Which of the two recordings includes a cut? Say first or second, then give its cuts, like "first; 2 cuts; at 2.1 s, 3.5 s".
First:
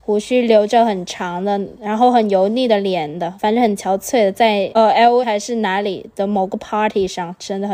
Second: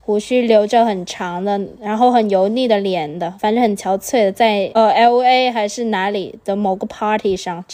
first; 1 cut; at 5.2 s